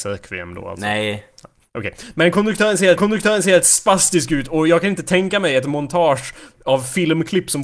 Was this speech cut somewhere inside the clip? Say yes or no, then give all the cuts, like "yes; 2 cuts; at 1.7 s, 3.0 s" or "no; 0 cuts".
yes; 1 cut; at 3.0 s